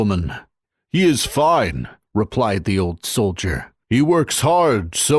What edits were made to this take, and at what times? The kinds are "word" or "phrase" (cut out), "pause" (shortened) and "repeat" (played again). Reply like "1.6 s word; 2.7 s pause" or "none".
none

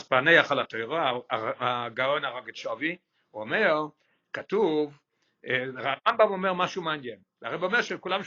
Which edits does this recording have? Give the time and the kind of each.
none

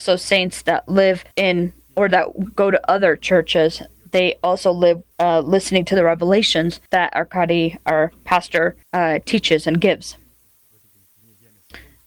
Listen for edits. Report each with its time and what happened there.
1.3 s pause; 5.1 s pause; 6.9 s pause; 8.8 s pause

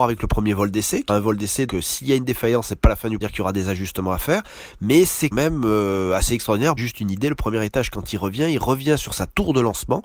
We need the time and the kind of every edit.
1.1 s word; 1.7 s word; 3.2 s phrase; 5.3 s word; 6.8 s phrase

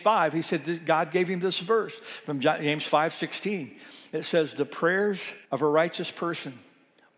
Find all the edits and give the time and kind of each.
5.4 s pause

